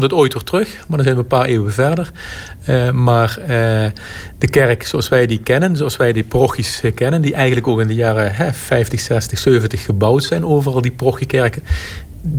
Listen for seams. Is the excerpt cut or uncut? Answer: uncut